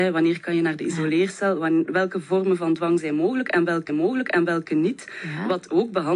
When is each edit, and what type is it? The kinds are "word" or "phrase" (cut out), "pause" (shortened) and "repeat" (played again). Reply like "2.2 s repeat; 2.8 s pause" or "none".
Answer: 3.9 s repeat